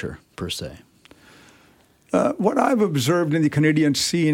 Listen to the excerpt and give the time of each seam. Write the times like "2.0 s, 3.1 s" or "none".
none